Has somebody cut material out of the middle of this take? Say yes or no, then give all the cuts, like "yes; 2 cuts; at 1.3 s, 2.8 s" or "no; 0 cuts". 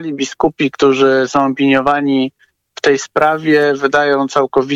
no; 0 cuts